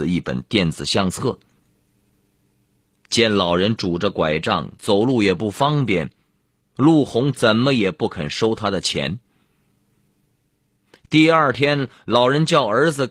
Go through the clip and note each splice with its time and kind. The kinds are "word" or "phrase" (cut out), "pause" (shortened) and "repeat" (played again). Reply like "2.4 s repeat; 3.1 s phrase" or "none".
none